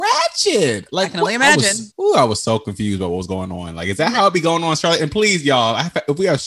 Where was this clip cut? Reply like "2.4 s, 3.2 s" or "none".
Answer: 1.9 s